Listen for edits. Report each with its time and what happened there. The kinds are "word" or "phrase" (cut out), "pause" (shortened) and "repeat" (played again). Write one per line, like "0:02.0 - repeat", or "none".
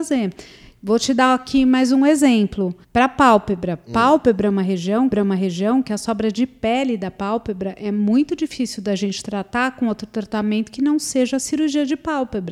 0:02.8 - pause
0:05.1 - repeat